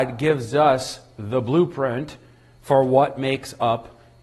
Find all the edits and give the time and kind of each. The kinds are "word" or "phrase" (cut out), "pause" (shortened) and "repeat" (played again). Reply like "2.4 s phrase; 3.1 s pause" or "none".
none